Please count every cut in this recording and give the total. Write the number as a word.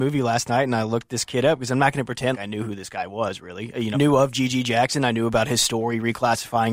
two